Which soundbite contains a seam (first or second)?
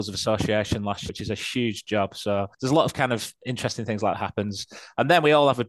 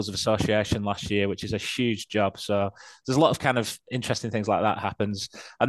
first